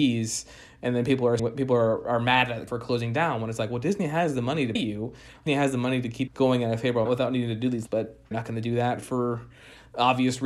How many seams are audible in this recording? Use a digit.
8